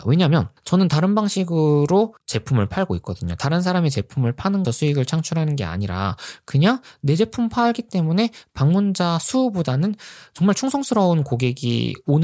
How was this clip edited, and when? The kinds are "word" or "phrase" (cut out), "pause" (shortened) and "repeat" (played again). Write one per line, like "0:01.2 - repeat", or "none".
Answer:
0:04.6 - phrase